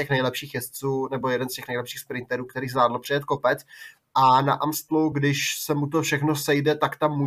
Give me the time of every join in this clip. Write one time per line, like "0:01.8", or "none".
none